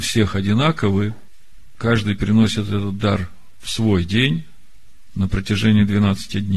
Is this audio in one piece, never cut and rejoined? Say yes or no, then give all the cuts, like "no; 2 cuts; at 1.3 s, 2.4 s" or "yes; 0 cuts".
yes; 0 cuts